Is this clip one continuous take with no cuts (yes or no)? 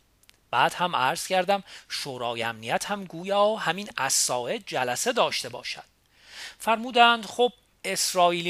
yes